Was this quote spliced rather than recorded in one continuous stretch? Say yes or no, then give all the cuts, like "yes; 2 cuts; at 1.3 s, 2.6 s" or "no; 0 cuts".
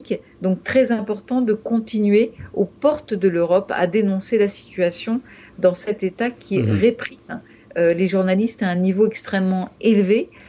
no; 0 cuts